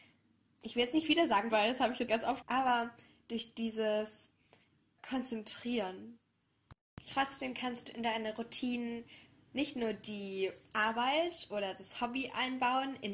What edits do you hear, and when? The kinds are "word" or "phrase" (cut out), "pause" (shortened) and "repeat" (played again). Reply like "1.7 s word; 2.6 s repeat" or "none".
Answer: 1.5 s word; 2.1 s word; 2.4 s word; 5.0 s word